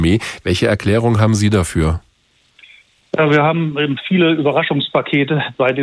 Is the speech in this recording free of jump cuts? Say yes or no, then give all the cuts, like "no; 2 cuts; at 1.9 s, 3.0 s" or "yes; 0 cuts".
yes; 0 cuts